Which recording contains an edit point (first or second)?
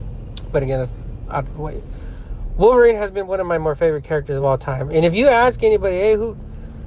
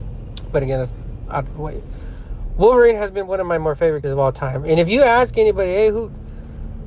second